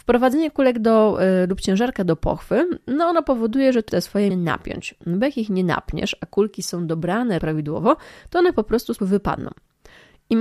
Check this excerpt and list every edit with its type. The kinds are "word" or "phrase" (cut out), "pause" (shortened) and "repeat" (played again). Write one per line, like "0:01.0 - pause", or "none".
0:03.9 - word
0:04.3 - word
0:07.4 - word
0:09.0 - word